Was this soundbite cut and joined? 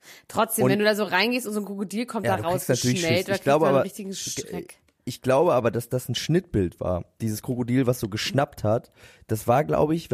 no; 0 cuts

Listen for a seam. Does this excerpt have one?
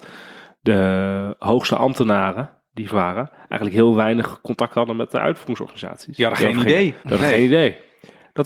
yes; 2 cuts; at 2.9 s, 7.0 s

